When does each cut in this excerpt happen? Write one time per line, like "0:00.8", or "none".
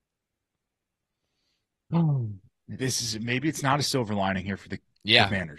none